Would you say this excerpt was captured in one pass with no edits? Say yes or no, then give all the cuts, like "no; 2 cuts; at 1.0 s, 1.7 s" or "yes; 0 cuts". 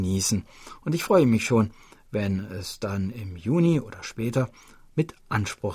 yes; 0 cuts